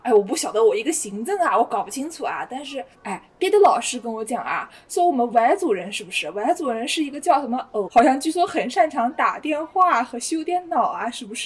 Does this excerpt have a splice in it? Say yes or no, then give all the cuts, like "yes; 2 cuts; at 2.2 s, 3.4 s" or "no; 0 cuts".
yes; 2 cuts; at 2.9 s, 7.8 s